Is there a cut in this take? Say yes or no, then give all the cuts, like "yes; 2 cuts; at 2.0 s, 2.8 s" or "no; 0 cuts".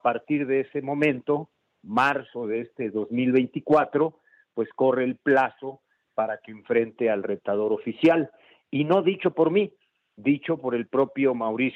no; 0 cuts